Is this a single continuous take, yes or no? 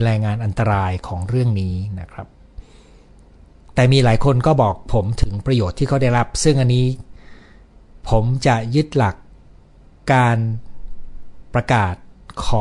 yes